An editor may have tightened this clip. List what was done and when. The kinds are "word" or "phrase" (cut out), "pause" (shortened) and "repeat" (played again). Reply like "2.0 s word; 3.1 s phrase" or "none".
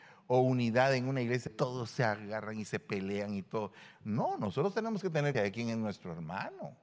1.5 s word; 5.3 s word